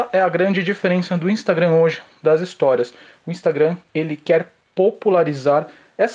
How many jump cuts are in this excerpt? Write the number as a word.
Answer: zero